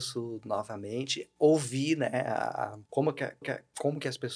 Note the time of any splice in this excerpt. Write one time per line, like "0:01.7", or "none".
0:02.9
0:03.4

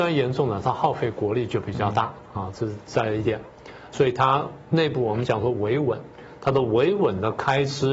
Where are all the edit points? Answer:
0:03.9

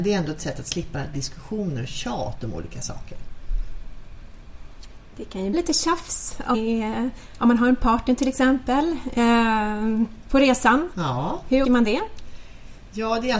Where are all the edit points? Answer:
0:01.1
0:05.5
0:06.5
0:11.6

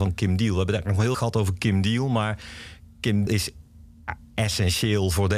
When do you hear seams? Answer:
0:01.1
0:03.3

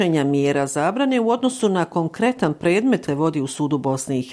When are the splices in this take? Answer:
0:03.1

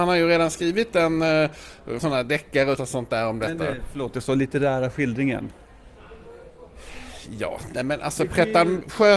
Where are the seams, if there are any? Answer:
0:02.0
0:02.8

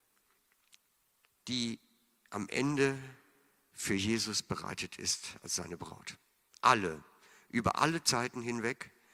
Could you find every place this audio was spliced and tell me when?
none

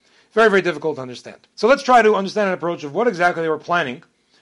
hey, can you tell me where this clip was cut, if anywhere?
0:01.5

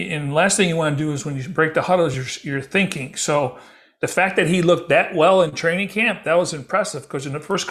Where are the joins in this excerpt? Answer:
none

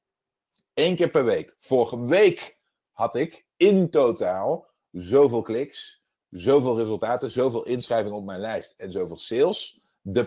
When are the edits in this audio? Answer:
none

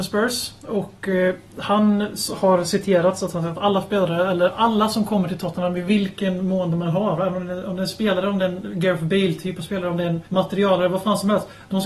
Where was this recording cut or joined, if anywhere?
0:10.3

